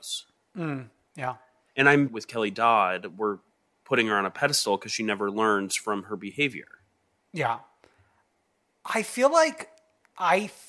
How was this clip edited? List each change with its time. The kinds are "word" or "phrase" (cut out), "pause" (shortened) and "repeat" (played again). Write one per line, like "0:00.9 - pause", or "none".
0:02.1 - phrase